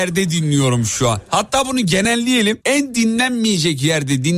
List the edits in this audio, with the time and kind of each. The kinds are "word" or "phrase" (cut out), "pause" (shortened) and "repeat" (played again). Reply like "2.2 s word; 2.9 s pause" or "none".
2.6 s pause